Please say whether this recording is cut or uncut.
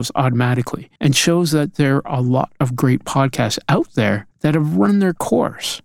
cut